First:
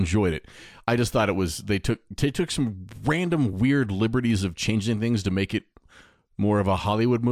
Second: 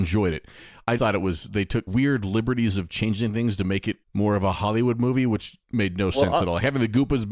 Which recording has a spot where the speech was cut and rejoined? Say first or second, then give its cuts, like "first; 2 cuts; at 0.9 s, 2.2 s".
second; 4 cuts; at 1.0 s, 1.9 s, 4.0 s, 5.6 s